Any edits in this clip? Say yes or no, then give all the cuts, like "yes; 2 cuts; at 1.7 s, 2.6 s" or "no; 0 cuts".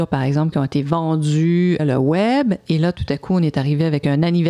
yes; 1 cut; at 1.8 s